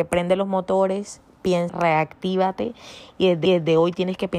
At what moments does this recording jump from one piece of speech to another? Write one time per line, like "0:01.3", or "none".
0:01.7
0:03.4